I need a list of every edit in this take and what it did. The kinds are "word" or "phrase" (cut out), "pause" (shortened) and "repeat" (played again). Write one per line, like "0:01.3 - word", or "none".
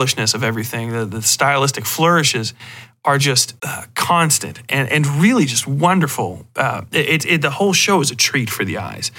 0:03.6 - pause